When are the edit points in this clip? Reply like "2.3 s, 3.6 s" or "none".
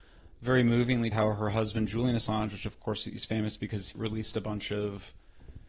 1.1 s, 3.9 s